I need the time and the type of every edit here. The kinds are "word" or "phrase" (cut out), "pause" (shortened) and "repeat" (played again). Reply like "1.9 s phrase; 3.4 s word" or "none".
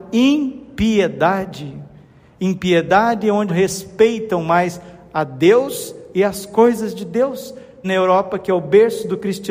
3.5 s phrase; 7.8 s word